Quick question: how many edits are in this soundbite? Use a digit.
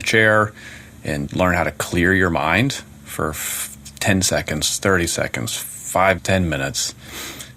2